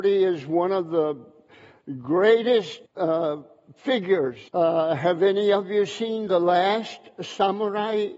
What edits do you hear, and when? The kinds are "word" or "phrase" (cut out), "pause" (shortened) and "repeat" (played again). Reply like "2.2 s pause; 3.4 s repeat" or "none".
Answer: 2.9 s pause; 4.5 s pause

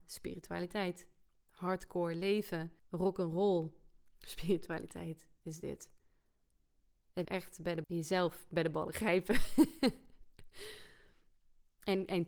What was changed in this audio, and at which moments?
2.8 s pause; 7.2 s word; 7.8 s phrase

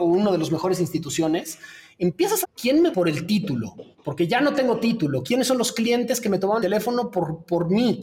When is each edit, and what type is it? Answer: 2.4 s phrase; 2.9 s word; 3.9 s pause; 6.6 s word

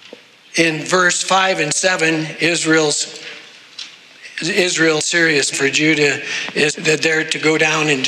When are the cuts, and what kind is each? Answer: 5.0 s word; 5.5 s word; 6.7 s word

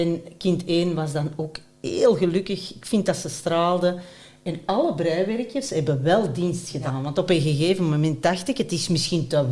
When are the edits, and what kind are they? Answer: none

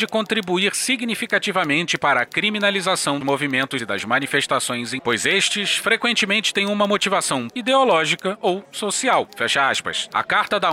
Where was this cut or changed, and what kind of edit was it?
3.2 s word; 3.8 s word; 5.0 s word; 7.5 s word

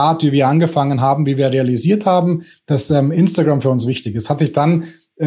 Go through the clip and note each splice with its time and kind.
none

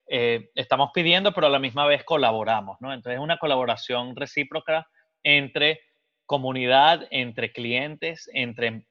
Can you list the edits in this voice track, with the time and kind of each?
none

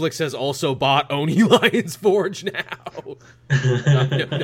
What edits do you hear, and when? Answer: none

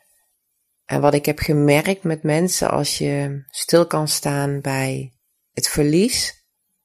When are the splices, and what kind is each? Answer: none

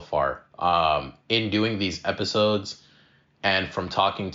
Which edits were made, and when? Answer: none

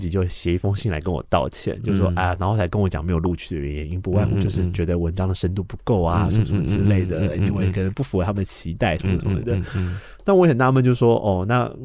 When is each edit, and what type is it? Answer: none

